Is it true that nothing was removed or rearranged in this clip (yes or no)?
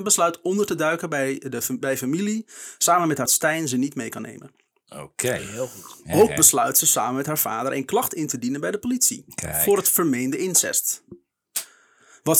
no